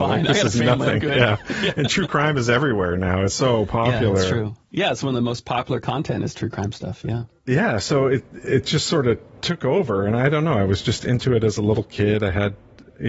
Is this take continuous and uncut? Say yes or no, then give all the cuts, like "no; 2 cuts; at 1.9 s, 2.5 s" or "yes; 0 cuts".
yes; 0 cuts